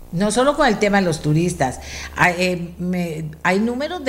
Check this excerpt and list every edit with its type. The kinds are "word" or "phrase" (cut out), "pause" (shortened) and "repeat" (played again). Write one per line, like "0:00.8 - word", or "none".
none